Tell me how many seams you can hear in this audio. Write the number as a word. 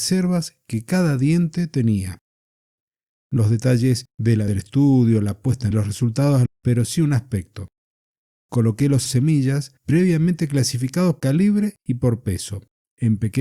eight